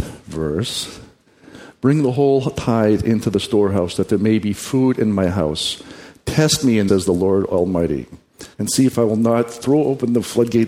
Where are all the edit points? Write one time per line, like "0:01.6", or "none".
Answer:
0:06.9
0:08.5